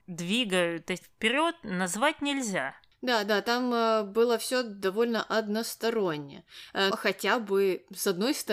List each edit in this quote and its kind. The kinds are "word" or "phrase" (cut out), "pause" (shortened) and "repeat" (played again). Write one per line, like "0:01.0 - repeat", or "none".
0:01.0 - word
0:06.9 - word

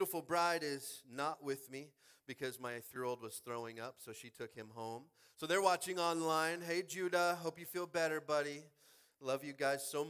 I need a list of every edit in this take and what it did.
0:03.0 - word

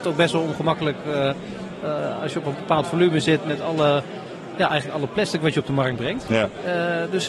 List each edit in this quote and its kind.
none

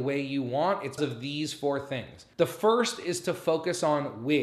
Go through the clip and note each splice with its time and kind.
0:01.0 - word
0:02.3 - pause

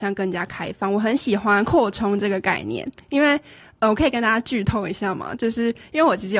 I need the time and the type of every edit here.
none

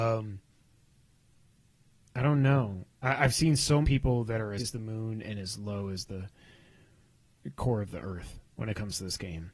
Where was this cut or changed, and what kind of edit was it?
0:03.8 - word
0:04.6 - word

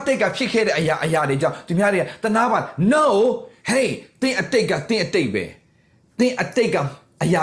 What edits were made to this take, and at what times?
none

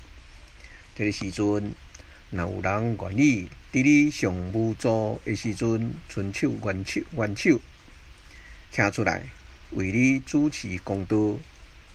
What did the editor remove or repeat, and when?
0:08.6 - pause

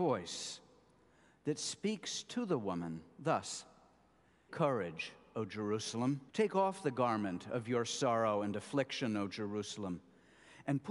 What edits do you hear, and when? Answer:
0:04.5 - word
0:06.3 - pause

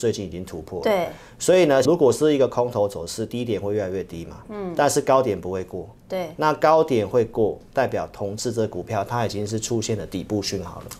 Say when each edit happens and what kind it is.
0:01.8 - phrase

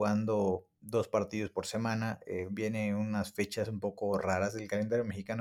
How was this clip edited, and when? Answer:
none

